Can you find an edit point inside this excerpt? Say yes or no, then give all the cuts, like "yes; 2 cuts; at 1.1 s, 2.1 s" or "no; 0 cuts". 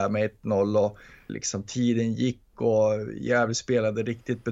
yes; 1 cut; at 1.3 s